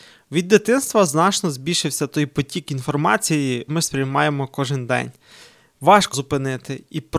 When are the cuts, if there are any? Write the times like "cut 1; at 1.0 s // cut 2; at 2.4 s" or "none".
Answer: cut 1; at 3.7 s // cut 2; at 6.1 s